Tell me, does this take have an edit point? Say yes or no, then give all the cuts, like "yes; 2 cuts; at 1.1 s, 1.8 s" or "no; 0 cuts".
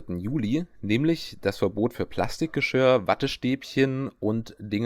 no; 0 cuts